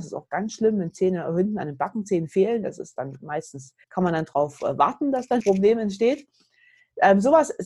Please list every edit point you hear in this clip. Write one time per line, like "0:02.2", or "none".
0:03.8
0:05.4